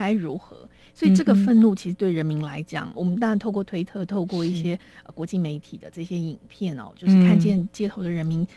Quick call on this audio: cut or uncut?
cut